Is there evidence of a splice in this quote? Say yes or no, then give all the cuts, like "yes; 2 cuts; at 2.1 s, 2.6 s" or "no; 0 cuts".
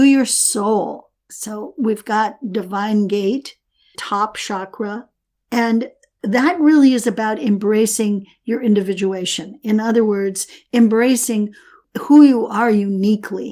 yes; 3 cuts; at 1.2 s, 3.9 s, 5.2 s